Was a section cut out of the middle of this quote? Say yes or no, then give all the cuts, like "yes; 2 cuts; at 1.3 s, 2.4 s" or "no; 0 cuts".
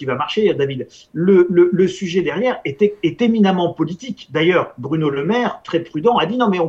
no; 0 cuts